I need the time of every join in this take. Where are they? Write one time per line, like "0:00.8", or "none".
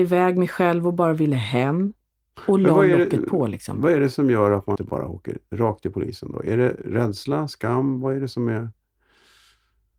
0:04.8